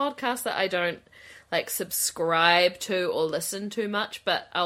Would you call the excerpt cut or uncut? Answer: uncut